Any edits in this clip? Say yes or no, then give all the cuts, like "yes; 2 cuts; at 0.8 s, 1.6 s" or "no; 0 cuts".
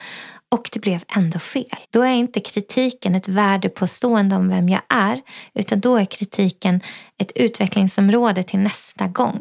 yes; 1 cut; at 1.8 s